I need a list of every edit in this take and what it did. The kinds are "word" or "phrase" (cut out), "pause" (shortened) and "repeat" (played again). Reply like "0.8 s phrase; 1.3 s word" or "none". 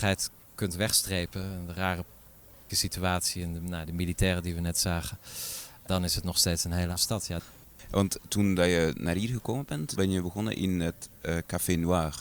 2.7 s word; 5.9 s word; 7.0 s word; 10.0 s word